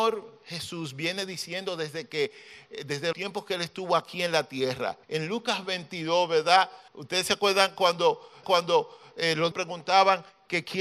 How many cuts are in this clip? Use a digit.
5